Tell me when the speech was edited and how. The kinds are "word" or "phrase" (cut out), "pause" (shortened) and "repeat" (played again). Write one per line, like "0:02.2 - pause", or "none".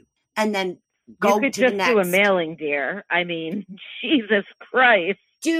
none